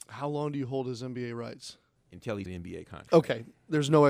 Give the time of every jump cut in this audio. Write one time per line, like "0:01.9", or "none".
0:02.0
0:02.5

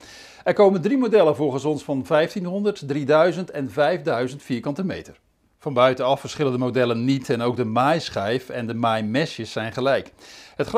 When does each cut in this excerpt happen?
none

